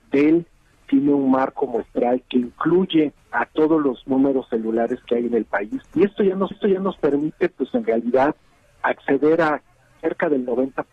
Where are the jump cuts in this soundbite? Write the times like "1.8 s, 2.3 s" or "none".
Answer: 3.2 s, 5.9 s, 6.5 s